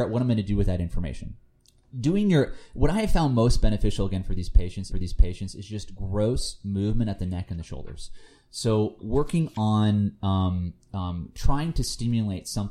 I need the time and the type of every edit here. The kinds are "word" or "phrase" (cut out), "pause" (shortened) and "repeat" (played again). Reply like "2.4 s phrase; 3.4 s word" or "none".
1.6 s pause; 4.9 s repeat; 9.0 s word

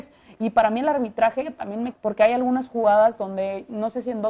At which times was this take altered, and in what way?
1.9 s phrase

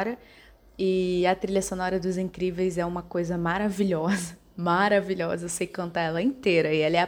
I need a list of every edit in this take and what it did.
none

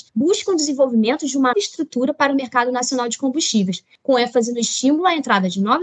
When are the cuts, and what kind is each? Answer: 1.5 s word

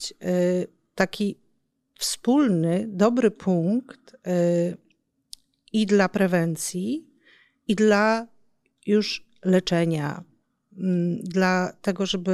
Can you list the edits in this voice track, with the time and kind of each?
none

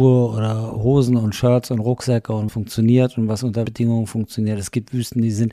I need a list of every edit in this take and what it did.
2.5 s word; 3.7 s word

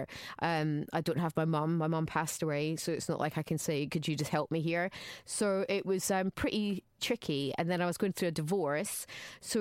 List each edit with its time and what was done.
7.0 s word

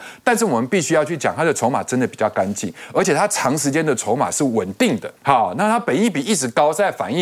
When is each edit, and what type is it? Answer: 5.2 s pause

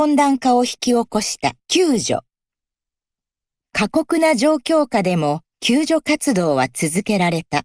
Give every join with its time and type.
1.6 s pause

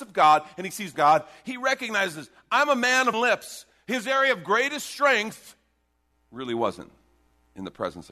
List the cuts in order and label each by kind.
0.9 s phrase; 3.1 s word; 6.1 s pause

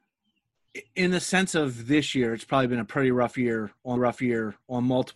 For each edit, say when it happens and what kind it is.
4.0 s repeat

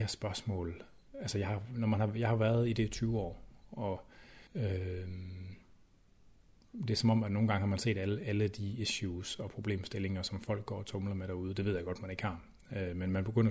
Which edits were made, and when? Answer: 4.5 s pause

